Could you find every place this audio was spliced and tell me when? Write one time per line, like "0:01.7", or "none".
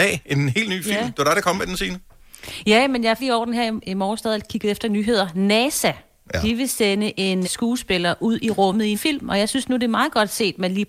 0:03.2
0:04.2
0:07.4
0:08.9